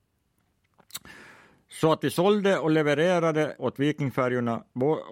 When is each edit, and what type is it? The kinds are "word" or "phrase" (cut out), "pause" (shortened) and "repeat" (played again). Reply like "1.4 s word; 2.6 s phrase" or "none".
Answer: 3.6 s word

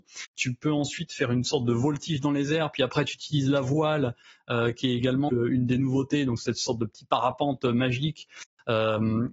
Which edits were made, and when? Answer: 5.3 s word

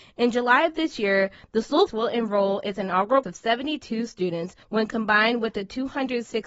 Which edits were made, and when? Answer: 1.9 s word; 3.2 s word; 4.6 s pause

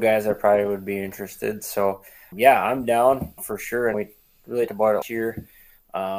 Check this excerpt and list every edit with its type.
2.3 s word; 3.4 s word; 3.9 s word; 4.7 s word; 5.0 s word

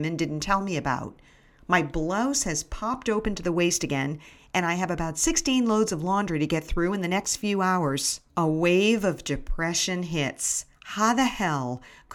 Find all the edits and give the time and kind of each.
8.3 s pause; 10.7 s pause

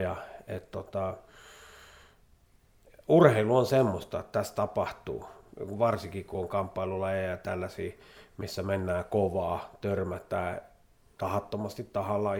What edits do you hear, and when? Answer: none

